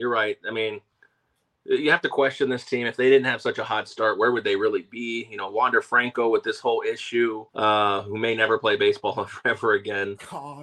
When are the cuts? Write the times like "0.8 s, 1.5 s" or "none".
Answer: 7.5 s